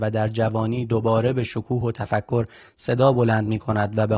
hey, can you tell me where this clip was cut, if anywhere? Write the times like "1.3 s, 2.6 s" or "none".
none

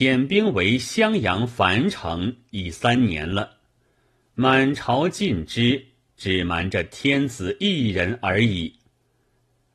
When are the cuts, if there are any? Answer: none

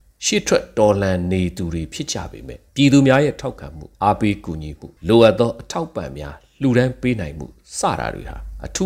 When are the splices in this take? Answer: 2.7 s, 3.9 s, 5.0 s

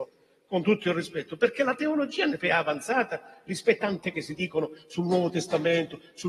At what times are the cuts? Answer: 2.4 s, 3.8 s, 4.1 s

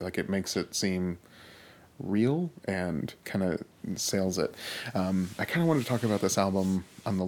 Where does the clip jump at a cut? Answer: 3.2 s

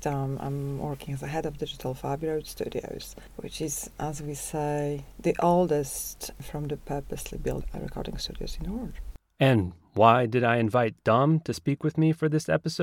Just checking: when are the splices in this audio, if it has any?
none

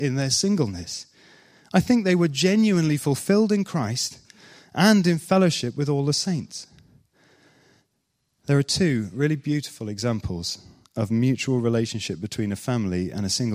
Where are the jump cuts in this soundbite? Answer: none

